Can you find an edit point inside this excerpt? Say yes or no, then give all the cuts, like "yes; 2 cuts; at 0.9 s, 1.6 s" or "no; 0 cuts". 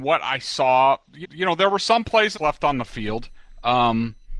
yes; 2 cuts; at 1.2 s, 2.3 s